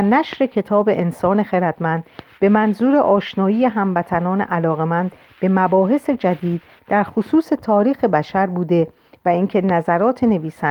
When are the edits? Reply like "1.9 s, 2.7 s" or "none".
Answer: none